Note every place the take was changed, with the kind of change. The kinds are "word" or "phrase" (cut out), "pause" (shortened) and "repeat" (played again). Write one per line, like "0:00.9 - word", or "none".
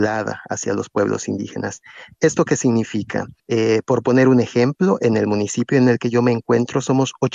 0:03.4 - pause